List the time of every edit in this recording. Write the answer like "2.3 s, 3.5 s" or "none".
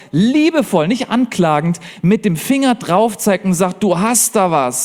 none